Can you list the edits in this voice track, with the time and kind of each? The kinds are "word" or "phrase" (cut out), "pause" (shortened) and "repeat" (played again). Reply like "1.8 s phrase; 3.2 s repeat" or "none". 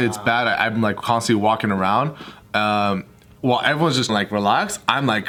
4.1 s word